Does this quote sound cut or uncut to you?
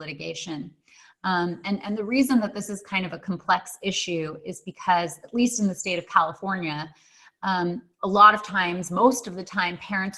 uncut